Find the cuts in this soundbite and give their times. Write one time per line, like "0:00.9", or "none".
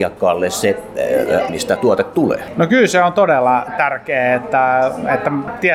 0:01.5